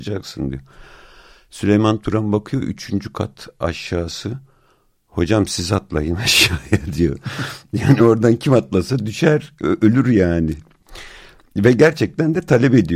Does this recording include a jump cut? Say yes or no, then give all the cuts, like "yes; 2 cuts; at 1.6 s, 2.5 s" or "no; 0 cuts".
no; 0 cuts